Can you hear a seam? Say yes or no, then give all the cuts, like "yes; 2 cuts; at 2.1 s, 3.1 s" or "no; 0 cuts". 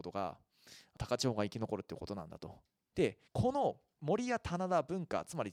yes; 1 cut; at 3.3 s